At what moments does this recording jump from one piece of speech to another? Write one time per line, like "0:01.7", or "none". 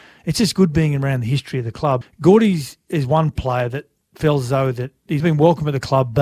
0:02.0
0:05.2